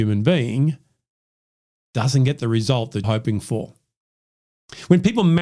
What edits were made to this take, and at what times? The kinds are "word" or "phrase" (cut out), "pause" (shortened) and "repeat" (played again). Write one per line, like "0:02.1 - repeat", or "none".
0:03.0 - word